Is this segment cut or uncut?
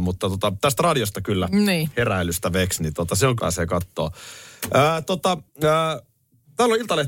cut